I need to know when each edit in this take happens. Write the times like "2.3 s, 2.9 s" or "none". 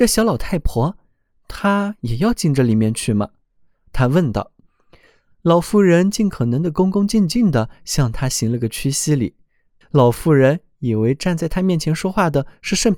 none